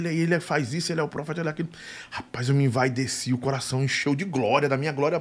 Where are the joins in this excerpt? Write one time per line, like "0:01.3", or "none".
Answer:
none